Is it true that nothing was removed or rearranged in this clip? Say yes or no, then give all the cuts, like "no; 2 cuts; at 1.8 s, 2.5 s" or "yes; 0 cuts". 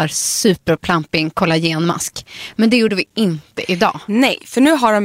yes; 0 cuts